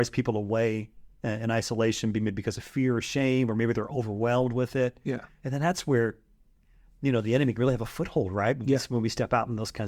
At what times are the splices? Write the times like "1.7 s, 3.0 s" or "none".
none

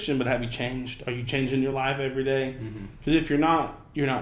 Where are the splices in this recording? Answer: none

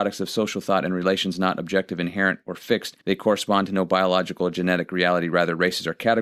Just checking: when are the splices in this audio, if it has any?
3.0 s

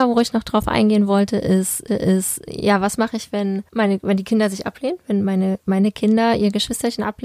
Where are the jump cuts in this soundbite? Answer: 1.9 s, 3.7 s

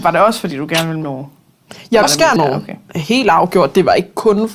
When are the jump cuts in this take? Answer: 1.0 s, 2.0 s, 2.4 s

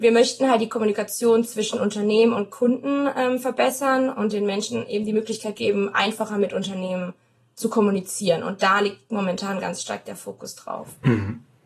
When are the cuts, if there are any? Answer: none

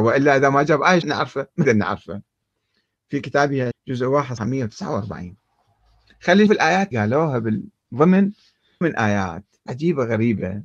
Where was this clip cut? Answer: 1.0 s, 1.6 s, 3.7 s, 4.4 s, 6.5 s, 6.9 s, 8.8 s, 9.7 s

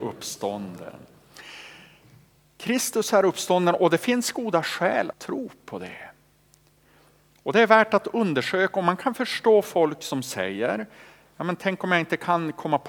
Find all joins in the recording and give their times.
5.1 s

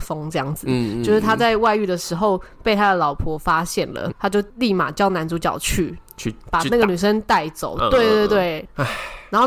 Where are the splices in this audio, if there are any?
4.1 s, 4.5 s

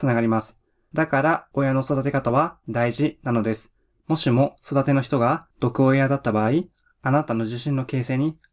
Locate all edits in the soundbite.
none

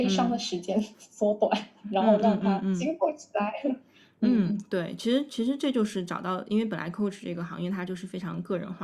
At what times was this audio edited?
none

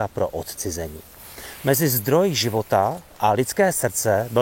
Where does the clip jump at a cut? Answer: none

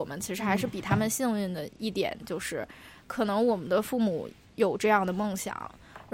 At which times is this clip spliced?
none

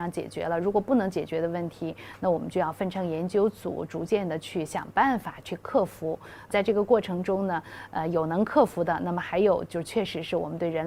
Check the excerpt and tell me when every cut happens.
6.5 s

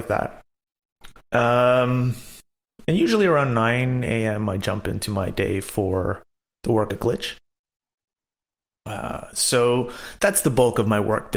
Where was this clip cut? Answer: 6.9 s

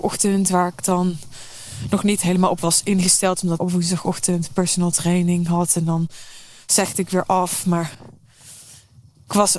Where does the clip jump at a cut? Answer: 3.6 s

